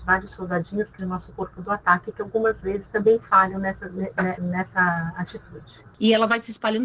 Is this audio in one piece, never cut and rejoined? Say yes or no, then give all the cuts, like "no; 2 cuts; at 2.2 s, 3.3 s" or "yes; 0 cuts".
no; 2 cuts; at 1.0 s, 4.4 s